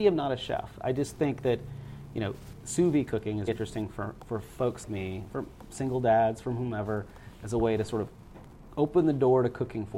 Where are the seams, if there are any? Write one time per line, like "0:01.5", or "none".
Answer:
0:03.5
0:04.8